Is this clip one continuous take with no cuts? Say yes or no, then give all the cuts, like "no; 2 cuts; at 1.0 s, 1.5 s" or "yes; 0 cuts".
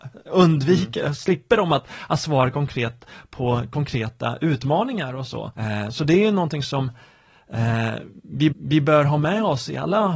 no; 2 cuts; at 5.5 s, 8.5 s